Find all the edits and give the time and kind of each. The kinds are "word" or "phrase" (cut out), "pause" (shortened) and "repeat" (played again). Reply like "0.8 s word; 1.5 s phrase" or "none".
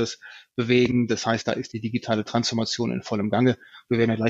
none